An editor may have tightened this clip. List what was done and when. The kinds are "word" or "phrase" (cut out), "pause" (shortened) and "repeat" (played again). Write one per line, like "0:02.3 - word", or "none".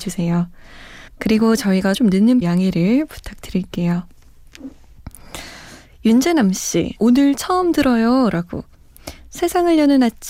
0:01.1 - pause
0:01.9 - word
0:02.4 - word
0:07.0 - word
0:09.2 - word